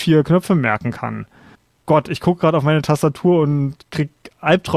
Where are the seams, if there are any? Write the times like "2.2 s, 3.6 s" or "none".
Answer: 1.5 s, 3.8 s